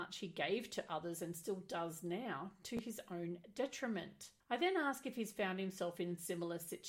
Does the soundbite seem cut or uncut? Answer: cut